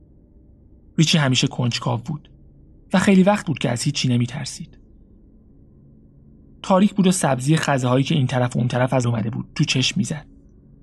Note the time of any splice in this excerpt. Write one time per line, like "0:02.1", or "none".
0:09.0